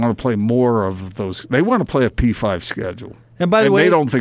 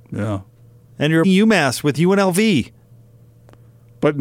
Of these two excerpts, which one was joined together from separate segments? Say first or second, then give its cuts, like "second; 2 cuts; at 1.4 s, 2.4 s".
second; 1 cut; at 1.2 s